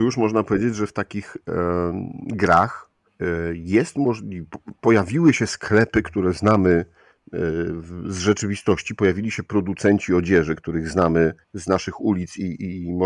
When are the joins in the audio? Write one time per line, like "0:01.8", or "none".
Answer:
0:03.1
0:11.4